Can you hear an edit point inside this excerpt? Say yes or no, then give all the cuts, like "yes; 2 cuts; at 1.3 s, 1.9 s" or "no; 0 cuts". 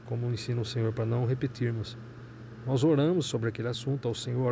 no; 0 cuts